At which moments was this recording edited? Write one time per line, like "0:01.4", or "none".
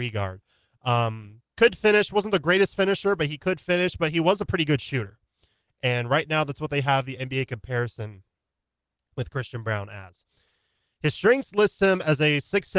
none